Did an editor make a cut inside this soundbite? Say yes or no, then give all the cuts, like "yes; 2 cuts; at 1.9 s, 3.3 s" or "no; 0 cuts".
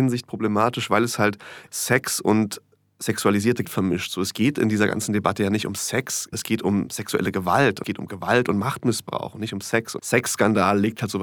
yes; 5 cuts; at 1.7 s, 3.6 s, 6.3 s, 7.8 s, 10.0 s